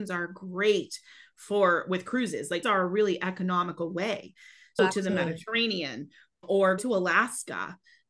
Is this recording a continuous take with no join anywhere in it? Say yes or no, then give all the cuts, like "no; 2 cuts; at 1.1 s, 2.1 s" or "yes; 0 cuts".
no; 3 cuts; at 2.6 s, 4.8 s, 6.8 s